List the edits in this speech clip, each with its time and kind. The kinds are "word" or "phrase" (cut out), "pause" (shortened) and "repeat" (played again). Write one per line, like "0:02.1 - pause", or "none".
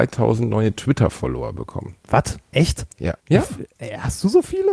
0:02.0 - pause
0:03.2 - pause